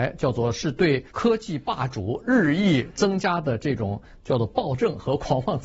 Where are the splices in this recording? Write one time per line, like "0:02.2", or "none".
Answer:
0:01.1